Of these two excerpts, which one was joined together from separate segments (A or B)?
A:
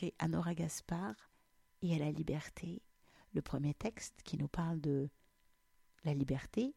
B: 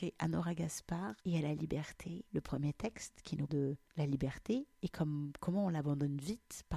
B